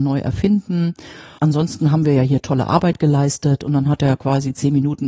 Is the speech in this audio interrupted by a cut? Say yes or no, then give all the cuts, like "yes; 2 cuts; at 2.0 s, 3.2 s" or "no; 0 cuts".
no; 0 cuts